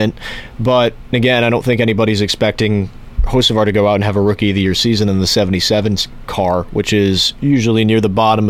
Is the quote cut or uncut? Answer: cut